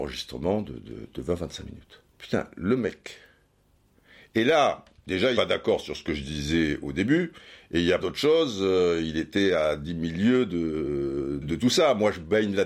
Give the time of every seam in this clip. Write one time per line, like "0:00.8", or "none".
0:02.1
0:05.4
0:08.0
0:11.4